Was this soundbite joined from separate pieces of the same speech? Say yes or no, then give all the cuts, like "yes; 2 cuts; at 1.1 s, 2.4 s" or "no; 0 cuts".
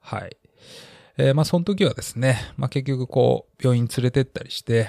no; 0 cuts